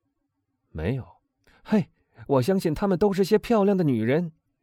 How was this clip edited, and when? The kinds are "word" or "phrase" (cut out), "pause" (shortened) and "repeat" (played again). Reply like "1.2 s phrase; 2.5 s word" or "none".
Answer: 1.3 s pause